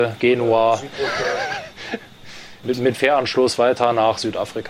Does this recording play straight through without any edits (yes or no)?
no